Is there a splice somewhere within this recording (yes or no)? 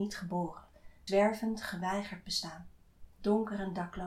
yes